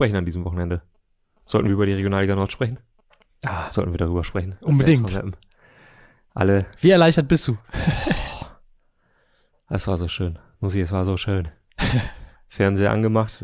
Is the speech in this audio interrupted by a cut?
no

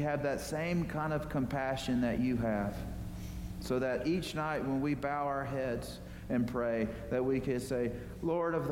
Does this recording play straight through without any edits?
yes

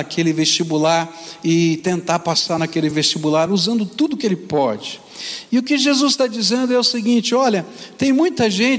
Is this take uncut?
yes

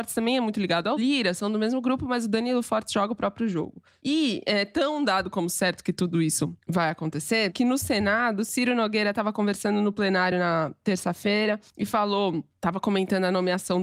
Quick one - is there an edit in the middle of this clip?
no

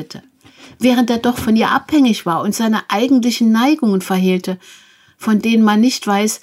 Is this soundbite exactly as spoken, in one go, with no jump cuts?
yes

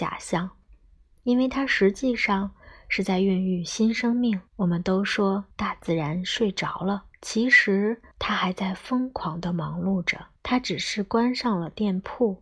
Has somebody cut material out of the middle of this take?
yes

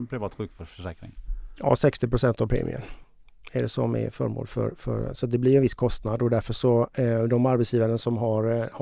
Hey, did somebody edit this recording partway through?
no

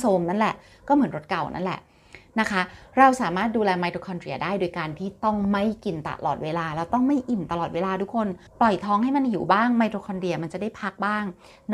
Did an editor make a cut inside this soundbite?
yes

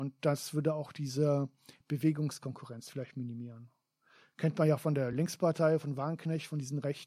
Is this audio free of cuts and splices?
yes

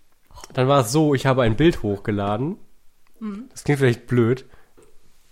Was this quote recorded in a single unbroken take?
yes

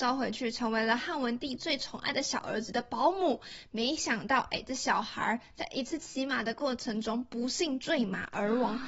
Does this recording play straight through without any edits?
yes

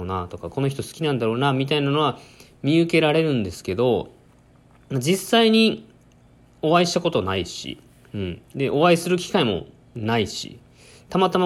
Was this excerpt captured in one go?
yes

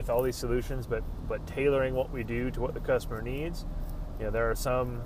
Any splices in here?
no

